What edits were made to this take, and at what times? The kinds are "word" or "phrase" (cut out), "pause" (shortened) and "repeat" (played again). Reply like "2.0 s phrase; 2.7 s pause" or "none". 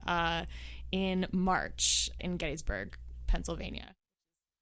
2.2 s word